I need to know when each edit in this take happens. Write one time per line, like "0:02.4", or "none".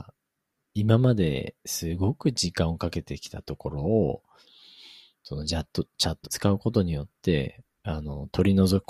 0:06.2